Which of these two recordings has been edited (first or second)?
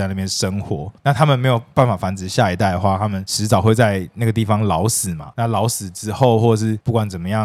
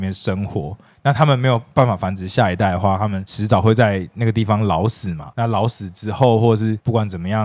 first